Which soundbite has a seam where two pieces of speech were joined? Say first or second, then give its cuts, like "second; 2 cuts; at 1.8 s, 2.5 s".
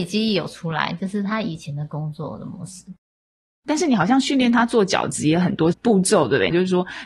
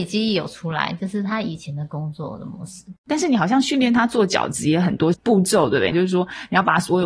second; 1 cut; at 3.0 s